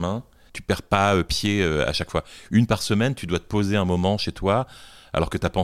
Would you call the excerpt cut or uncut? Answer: uncut